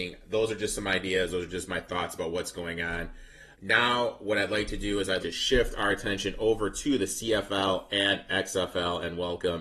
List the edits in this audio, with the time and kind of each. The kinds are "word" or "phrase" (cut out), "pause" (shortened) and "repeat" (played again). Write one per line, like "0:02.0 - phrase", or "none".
0:03.5 - pause
0:05.2 - word